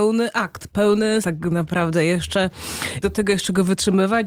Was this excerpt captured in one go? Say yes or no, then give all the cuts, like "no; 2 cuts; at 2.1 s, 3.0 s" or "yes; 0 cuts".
no; 2 cuts; at 1.2 s, 3.0 s